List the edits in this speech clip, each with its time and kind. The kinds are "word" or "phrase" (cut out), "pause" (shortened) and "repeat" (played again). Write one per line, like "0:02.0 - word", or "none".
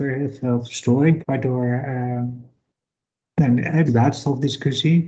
0:01.2 - word
0:03.9 - word